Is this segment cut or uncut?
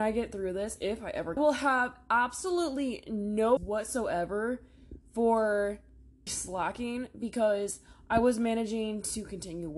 cut